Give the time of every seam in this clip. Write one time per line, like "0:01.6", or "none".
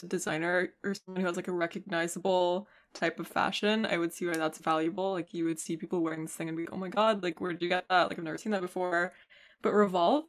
0:06.7